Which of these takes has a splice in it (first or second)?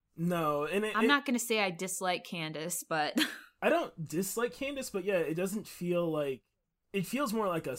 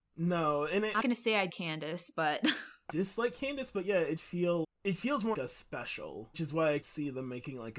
second